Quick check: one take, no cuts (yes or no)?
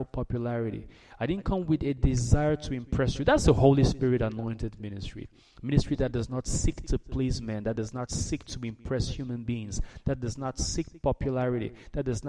yes